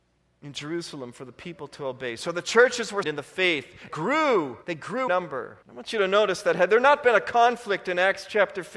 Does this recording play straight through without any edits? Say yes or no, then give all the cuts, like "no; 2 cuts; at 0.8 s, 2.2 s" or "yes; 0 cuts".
no; 5 cuts; at 3.0 s, 3.9 s, 4.6 s, 5.1 s, 5.6 s